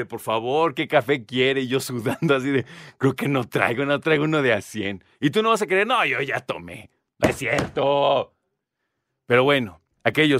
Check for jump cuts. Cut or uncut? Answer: uncut